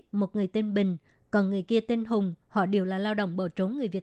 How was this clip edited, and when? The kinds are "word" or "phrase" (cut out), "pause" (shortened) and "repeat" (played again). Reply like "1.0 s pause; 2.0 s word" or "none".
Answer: none